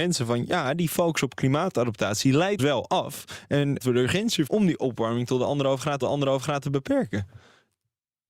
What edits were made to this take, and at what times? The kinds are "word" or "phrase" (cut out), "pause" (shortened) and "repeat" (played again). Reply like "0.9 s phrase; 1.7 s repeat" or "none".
2.6 s word; 3.8 s phrase; 4.5 s word; 6.0 s repeat